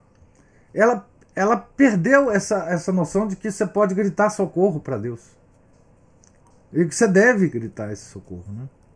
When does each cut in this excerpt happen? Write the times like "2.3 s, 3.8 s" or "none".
none